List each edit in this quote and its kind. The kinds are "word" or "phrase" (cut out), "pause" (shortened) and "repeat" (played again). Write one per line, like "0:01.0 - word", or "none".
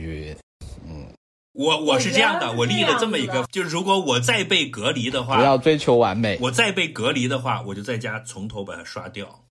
0:03.5 - word